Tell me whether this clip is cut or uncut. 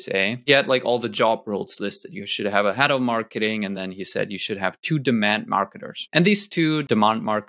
uncut